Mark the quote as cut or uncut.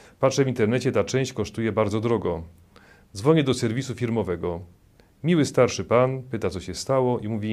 uncut